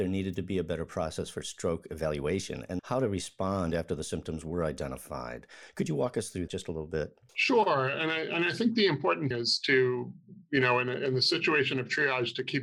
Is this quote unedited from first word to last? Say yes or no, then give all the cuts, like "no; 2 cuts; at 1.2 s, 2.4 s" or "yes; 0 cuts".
no; 4 cuts; at 2.8 s, 6.5 s, 7.3 s, 9.3 s